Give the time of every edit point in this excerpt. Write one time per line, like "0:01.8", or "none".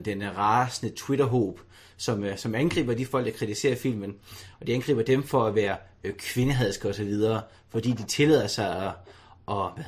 none